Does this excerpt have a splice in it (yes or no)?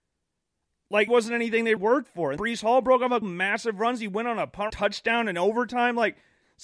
yes